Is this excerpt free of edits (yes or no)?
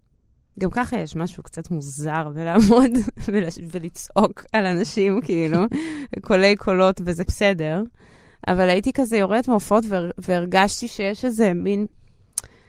no